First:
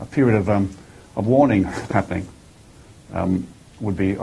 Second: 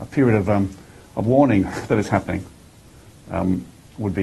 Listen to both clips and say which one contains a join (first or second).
first